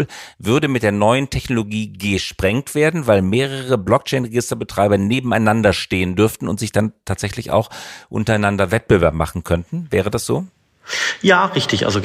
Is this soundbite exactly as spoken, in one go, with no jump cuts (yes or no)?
yes